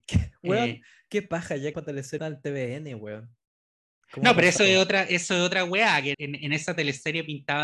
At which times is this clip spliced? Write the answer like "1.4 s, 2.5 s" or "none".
1.7 s, 2.2 s, 4.6 s, 6.1 s